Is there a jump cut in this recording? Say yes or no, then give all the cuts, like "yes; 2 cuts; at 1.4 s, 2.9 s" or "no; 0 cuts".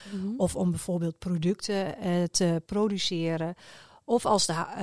no; 0 cuts